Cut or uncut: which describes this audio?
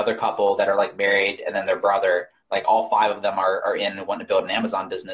uncut